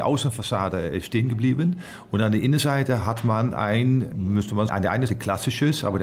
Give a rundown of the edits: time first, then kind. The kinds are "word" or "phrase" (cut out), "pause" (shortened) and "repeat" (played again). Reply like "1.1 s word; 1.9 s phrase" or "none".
4.7 s word; 5.1 s word